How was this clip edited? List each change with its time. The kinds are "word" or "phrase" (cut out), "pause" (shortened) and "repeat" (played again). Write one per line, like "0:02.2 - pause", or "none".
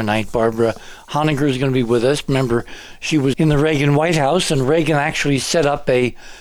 0:03.3 - phrase